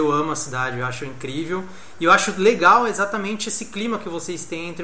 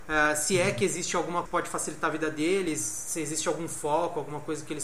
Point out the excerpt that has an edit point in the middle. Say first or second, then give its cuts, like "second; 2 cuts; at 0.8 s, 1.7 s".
second; 1 cut; at 1.4 s